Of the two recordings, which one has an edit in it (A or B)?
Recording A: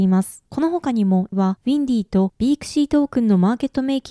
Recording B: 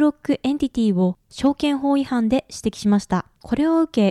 A